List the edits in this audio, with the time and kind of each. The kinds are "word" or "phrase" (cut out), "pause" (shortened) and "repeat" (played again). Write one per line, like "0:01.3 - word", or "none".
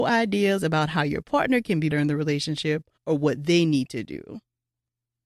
0:01.9 - word
0:03.0 - pause